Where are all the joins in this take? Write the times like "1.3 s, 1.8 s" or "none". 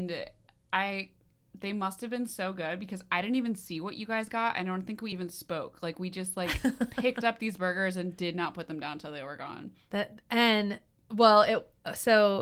none